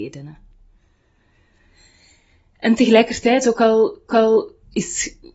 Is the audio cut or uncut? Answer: cut